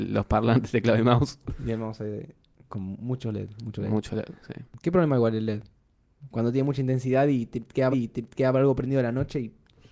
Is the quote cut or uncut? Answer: cut